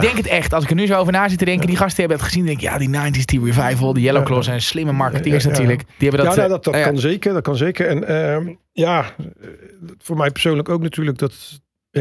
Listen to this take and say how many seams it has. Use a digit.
2